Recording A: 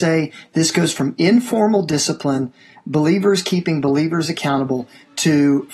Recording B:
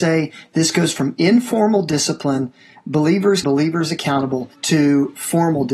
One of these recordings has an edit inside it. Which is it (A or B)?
B